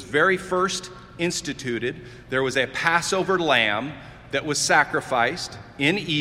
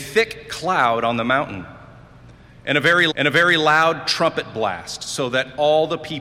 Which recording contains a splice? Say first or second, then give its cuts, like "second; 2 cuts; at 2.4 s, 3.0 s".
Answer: second; 1 cut; at 3.1 s